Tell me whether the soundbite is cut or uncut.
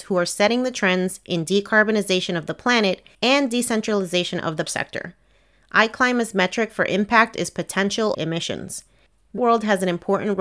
cut